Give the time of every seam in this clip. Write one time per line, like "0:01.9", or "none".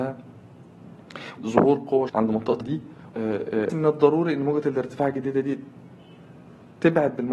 0:01.4
0:02.1
0:02.6
0:03.1
0:03.7